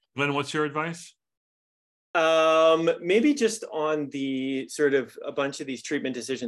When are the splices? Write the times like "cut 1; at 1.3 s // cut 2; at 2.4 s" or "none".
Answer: none